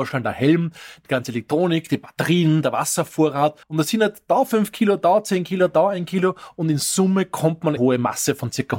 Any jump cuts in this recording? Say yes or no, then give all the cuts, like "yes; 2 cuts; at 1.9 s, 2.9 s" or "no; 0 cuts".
yes; 2 cuts; at 3.6 s, 7.8 s